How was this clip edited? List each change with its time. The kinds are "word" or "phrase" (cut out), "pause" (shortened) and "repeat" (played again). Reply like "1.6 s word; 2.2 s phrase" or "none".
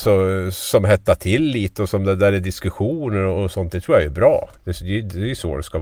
none